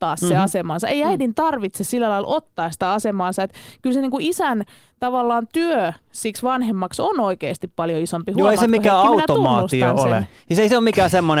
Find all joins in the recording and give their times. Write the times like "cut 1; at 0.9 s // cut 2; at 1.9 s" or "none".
none